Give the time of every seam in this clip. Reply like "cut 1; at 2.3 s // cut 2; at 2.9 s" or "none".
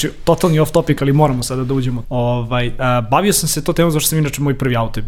cut 1; at 2.0 s